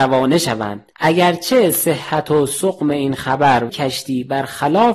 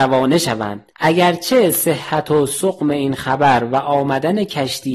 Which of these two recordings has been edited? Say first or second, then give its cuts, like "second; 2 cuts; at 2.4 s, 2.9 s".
first; 1 cut; at 3.7 s